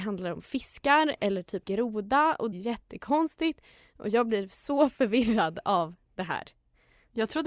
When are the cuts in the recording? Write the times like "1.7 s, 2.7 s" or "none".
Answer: 1.6 s, 2.5 s